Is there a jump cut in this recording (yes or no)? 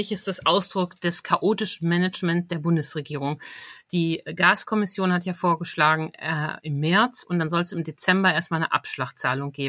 no